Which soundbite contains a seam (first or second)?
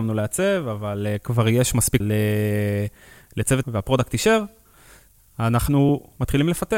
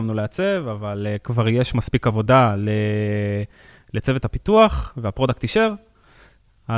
first